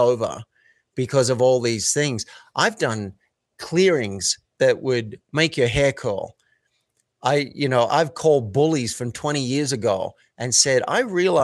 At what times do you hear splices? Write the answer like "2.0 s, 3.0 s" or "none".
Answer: 7.9 s